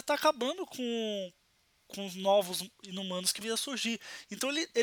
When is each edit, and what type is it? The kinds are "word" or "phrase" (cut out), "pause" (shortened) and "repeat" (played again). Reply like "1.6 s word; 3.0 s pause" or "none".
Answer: 3.4 s word